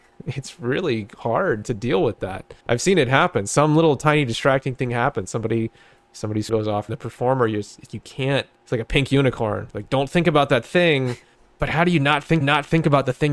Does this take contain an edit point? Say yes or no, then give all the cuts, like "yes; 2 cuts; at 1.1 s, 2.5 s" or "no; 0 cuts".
yes; 7 cuts; at 2.6 s, 6.5 s, 6.9 s, 7.9 s, 8.6 s, 11.3 s, 12.4 s